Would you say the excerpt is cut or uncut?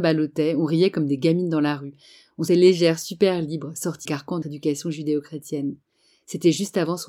cut